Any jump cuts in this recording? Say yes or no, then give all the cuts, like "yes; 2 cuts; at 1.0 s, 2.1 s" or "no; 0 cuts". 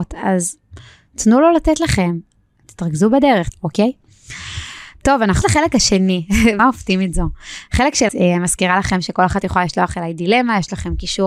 yes; 4 cuts; at 3.5 s, 5.4 s, 6.6 s, 8.1 s